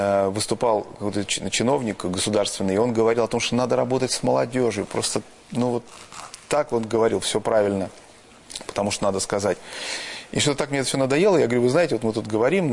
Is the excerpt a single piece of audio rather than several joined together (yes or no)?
yes